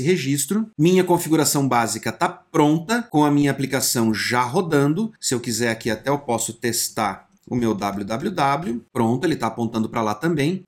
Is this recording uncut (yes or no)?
no